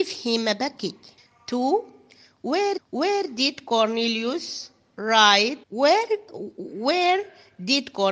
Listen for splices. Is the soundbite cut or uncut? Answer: cut